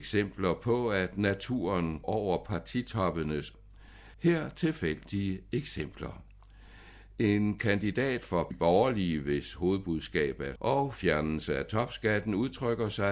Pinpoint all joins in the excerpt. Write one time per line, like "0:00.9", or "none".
0:02.0
0:03.5
0:04.1
0:08.5
0:10.6